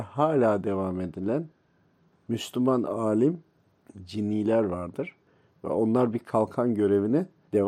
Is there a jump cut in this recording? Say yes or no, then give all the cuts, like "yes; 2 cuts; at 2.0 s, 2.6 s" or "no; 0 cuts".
no; 0 cuts